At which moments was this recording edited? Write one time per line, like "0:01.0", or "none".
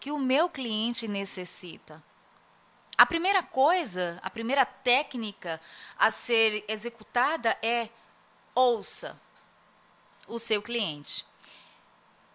none

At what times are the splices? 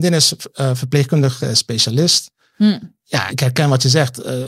0:03.3

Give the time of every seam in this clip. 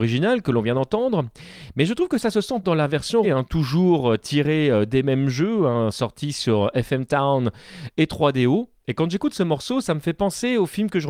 0:02.6
0:03.2

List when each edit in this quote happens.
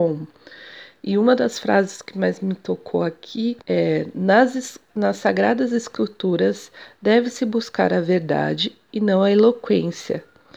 0:03.6

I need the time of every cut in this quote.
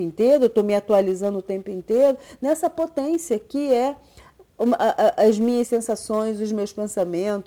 none

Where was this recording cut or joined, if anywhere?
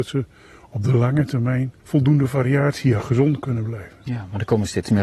0:01.8
0:03.0

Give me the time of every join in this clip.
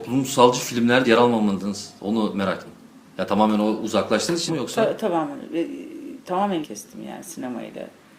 0:01.0
0:02.7
0:04.5
0:06.6

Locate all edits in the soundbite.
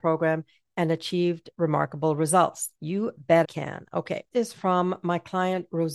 0:02.8
0:03.4
0:04.3

